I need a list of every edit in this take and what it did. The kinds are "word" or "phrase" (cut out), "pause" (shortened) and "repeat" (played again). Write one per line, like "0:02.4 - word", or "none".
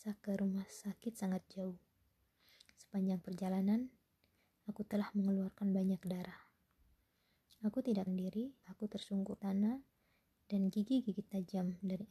0:08.1 - word
0:08.6 - word
0:09.4 - word